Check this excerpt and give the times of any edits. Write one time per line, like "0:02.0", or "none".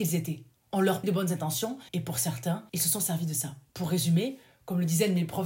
0:01.0
0:01.9
0:02.7
0:03.7